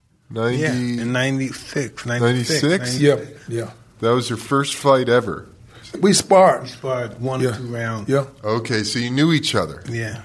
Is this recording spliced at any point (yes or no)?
yes